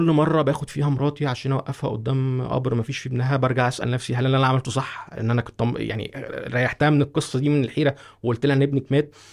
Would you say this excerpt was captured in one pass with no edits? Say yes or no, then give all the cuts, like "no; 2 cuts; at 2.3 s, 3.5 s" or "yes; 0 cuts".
yes; 0 cuts